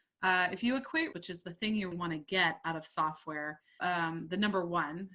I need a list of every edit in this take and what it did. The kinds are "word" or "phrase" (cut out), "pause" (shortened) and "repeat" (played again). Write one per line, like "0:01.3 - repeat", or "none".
0:01.1 - word
0:01.9 - word
0:03.8 - word